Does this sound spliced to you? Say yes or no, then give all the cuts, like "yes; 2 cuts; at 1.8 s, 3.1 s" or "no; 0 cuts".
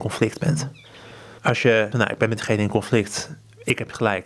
yes; 2 cuts; at 1.4 s, 1.9 s